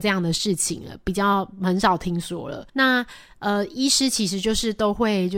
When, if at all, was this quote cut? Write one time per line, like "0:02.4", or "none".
0:02.7

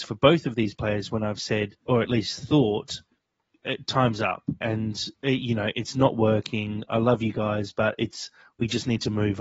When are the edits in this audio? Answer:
0:01.8
0:04.6
0:05.1

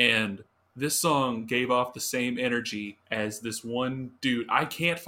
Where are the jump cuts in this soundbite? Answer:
0:03.0

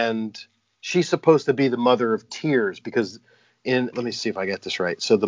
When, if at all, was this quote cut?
0:03.9

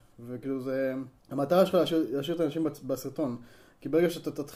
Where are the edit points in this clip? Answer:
0:01.2

